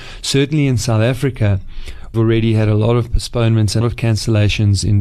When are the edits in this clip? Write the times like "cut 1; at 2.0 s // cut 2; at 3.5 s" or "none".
cut 1; at 2.1 s // cut 2; at 3.8 s

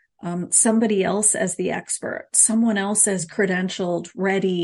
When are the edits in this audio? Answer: none

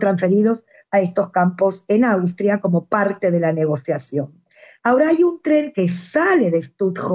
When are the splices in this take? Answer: none

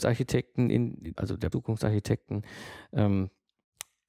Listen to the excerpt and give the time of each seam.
cut 1; at 1.2 s // cut 2; at 1.5 s

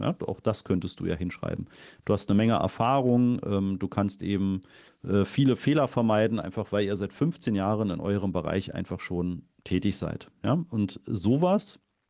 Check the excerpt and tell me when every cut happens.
cut 1; at 4.9 s

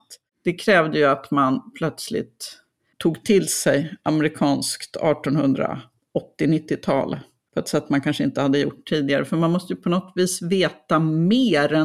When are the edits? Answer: none

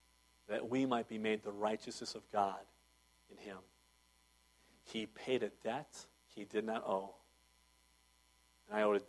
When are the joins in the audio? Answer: cut 1; at 6.1 s

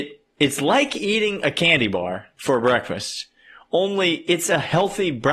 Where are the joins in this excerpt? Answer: none

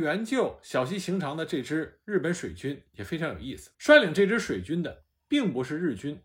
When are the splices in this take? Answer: cut 1; at 3.7 s

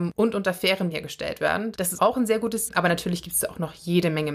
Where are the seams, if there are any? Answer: cut 1; at 0.9 s // cut 2; at 2.0 s // cut 3; at 2.7 s

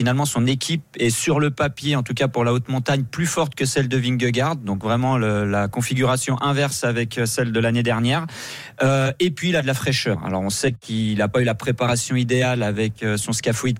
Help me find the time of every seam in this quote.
none

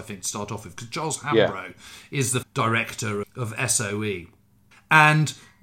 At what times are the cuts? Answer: cut 1; at 2.4 s // cut 2; at 3.2 s // cut 3; at 4.7 s

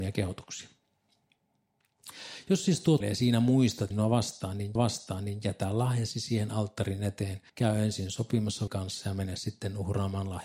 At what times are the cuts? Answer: cut 1; at 3.0 s // cut 2; at 3.9 s // cut 3; at 4.8 s // cut 4; at 7.5 s // cut 5; at 8.7 s

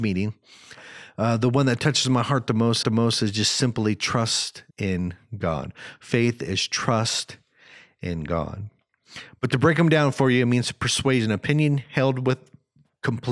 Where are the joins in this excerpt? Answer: cut 1; at 2.8 s // cut 2; at 4.7 s

